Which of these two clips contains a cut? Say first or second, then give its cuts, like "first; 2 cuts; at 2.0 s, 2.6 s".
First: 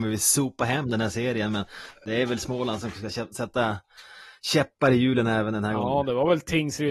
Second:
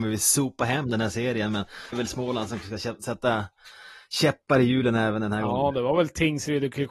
second; 1 cut; at 1.9 s